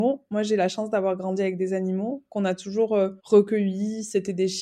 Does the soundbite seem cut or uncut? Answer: cut